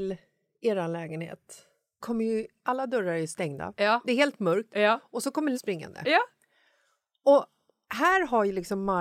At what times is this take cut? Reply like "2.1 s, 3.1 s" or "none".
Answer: 2.0 s, 5.5 s